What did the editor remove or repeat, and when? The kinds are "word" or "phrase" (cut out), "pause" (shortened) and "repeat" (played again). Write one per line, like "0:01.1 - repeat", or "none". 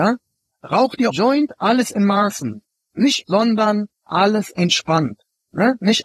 0:01.1 - phrase
0:03.2 - word

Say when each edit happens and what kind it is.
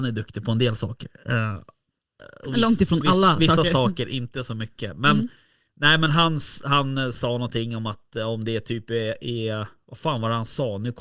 none

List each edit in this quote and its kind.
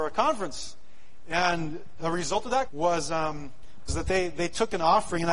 0:02.0 - word
0:02.7 - word
0:03.9 - word

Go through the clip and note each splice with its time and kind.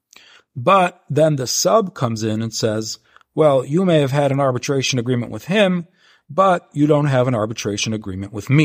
none

